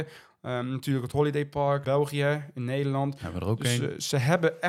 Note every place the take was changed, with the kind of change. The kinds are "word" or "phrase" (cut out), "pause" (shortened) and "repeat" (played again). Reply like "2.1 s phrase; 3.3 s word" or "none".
1.8 s phrase